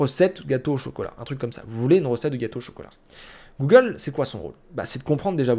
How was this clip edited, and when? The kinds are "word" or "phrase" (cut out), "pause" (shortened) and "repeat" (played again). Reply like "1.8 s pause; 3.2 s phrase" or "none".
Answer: none